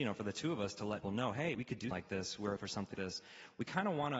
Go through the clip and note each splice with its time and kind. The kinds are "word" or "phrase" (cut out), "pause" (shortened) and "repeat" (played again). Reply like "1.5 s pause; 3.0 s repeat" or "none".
1.0 s word; 1.5 s word; 1.9 s word; 2.6 s word; 2.9 s word